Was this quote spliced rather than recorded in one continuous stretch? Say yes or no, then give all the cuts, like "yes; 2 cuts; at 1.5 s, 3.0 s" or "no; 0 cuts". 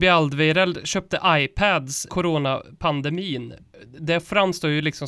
yes; 1 cut; at 2.1 s